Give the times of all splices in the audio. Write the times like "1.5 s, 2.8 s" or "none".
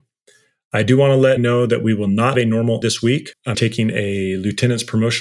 1.4 s, 2.3 s, 2.8 s, 3.5 s